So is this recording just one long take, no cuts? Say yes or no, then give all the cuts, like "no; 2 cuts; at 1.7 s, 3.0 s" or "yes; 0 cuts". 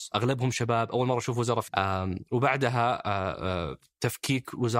no; 1 cut; at 1.7 s